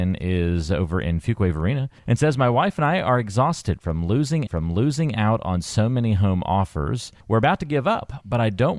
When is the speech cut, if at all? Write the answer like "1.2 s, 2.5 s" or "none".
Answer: 2.0 s, 4.5 s, 7.2 s